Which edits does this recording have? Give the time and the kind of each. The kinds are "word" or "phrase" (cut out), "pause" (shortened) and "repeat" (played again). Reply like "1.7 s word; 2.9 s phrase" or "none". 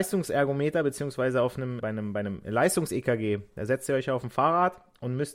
1.8 s word